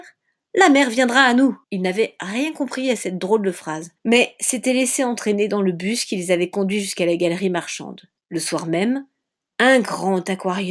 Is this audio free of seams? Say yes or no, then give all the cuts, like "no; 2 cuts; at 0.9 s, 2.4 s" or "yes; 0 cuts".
no; 3 cuts; at 1.6 s, 4.0 s, 8.2 s